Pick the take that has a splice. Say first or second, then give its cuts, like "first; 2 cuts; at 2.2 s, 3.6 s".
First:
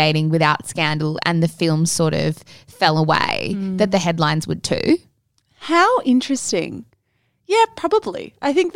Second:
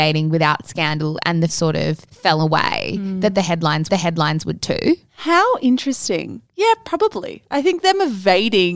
second; 5 cuts; at 1.5 s, 2.1 s, 3.9 s, 5.1 s, 6.5 s